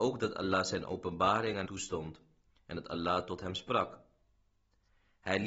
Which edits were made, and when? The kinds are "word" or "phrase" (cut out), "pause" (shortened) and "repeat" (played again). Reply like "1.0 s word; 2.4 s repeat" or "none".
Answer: 1.7 s word